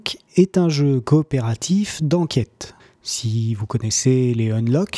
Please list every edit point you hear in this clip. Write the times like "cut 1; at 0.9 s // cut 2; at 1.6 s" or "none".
cut 1; at 2.8 s